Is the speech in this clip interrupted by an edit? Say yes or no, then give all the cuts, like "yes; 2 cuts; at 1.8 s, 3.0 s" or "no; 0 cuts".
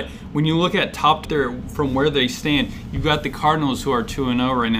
yes; 1 cut; at 1.2 s